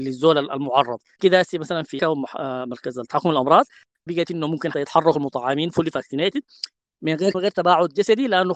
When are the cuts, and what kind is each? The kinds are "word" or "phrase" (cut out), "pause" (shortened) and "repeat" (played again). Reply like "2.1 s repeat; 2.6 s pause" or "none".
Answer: 1.2 s word; 2.0 s word; 4.1 s word; 4.7 s word; 7.3 s word